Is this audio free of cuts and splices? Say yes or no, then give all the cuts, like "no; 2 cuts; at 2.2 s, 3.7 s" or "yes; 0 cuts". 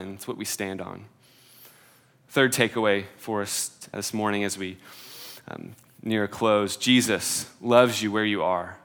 no; 1 cut; at 3.9 s